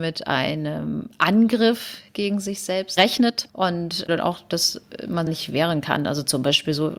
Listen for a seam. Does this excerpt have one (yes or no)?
yes